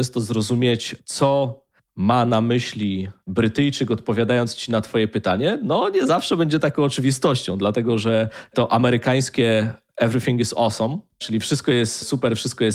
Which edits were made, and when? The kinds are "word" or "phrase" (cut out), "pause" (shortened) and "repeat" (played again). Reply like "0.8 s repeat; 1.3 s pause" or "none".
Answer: none